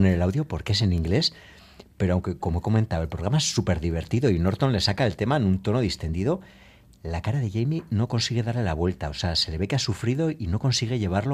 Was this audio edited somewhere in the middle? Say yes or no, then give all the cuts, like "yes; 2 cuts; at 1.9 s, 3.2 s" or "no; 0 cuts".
no; 0 cuts